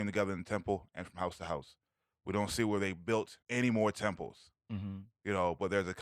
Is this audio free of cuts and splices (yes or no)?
no